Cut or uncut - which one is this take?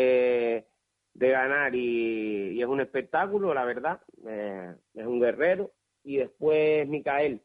uncut